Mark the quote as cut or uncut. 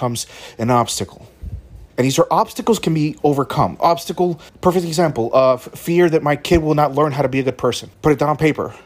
cut